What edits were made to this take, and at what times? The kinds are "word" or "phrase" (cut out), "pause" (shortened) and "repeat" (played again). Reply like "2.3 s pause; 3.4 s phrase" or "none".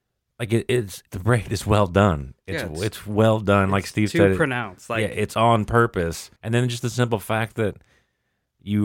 1.1 s pause; 6.4 s pause